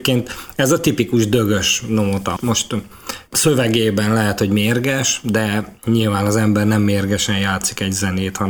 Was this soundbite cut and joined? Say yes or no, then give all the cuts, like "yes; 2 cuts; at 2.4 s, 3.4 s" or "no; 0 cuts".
yes; 1 cut; at 2.4 s